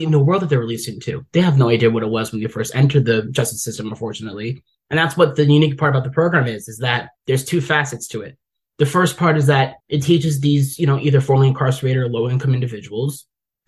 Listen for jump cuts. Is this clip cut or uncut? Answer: cut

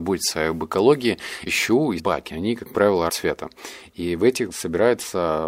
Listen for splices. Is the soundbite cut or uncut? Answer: cut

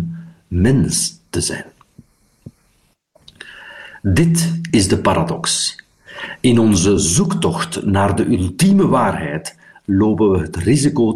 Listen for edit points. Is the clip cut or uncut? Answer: uncut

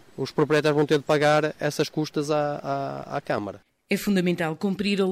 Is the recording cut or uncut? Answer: uncut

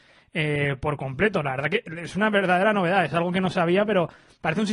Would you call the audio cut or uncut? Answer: uncut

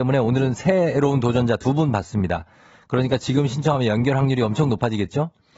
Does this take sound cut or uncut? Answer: uncut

